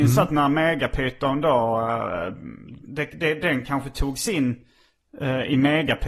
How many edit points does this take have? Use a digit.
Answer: 0